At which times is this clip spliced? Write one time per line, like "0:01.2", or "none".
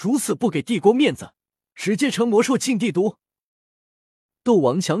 none